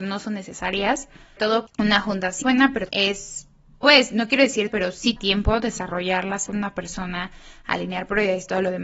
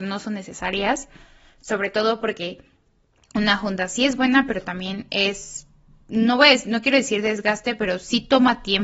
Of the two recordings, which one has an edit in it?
first; 8 cuts; at 1.4 s, 1.7 s, 2.4 s, 2.9 s, 3.8 s, 4.7 s, 5.2 s, 6.5 s

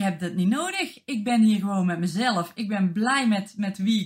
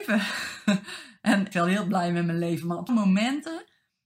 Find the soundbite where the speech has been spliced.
second; 2 cuts; at 1.5 s, 2.9 s

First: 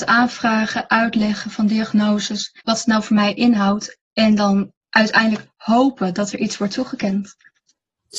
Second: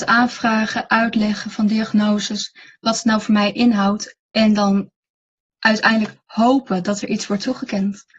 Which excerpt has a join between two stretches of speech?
first; 2 cuts; at 2.6 s, 4.8 s

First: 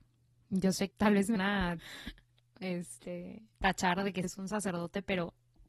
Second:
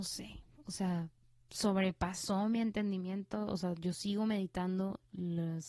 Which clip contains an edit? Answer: first; 5 cuts; at 0.9 s, 1.4 s, 1.8 s, 3.5 s, 4.2 s

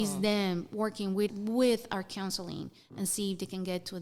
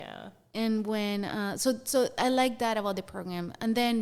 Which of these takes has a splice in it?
first; 1 cut; at 1.3 s

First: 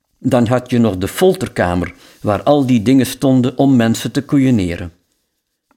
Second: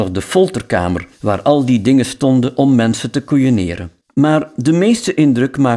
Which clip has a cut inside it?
second; 2 cuts; at 1.1 s, 4.0 s

